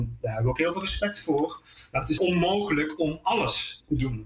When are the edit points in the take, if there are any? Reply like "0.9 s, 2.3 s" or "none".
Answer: 2.2 s